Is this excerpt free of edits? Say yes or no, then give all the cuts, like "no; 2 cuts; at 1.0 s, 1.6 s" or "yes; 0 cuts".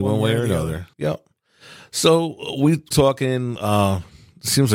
no; 2 cuts; at 0.9 s, 2.9 s